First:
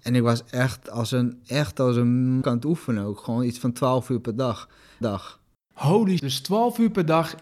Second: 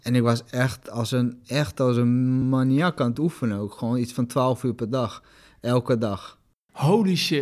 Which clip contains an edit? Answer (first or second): first